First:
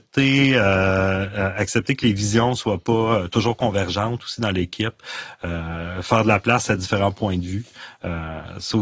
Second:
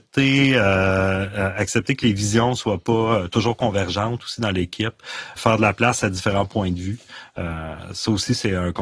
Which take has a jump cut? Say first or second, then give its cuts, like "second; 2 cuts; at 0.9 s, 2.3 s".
second; 1 cut; at 5.4 s